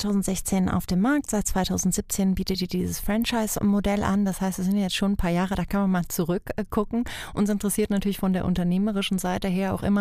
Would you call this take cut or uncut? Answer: uncut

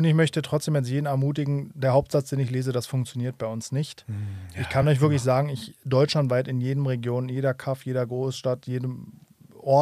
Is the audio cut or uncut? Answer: uncut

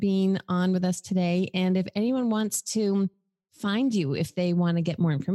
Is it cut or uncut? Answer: uncut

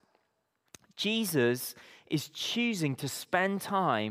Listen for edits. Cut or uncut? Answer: uncut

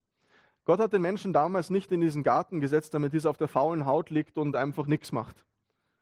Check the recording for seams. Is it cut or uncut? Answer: uncut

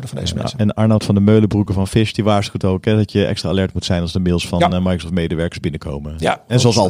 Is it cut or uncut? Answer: uncut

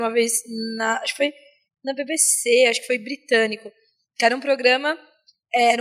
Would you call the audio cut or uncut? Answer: uncut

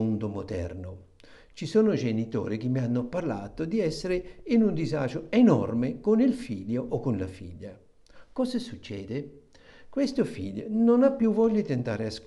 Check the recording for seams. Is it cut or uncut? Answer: uncut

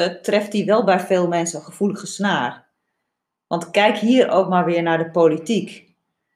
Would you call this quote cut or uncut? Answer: uncut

